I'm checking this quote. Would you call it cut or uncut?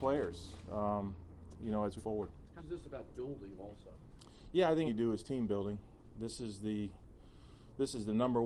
cut